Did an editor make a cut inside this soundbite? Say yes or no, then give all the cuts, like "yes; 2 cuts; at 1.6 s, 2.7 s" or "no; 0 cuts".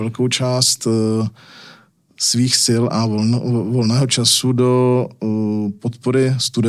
no; 0 cuts